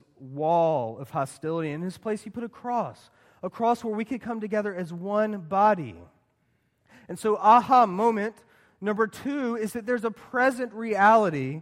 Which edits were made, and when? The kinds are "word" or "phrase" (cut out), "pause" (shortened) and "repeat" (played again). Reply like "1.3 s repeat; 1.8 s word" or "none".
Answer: none